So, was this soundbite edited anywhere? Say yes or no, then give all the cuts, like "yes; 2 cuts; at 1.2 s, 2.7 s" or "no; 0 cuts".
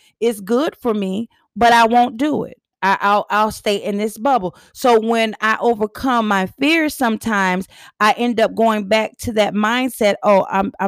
no; 0 cuts